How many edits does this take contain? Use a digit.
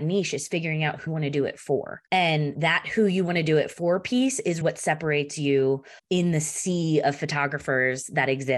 4